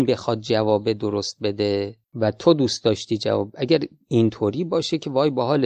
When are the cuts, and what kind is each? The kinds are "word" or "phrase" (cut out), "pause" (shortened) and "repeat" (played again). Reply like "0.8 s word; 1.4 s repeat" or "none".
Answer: 2.0 s pause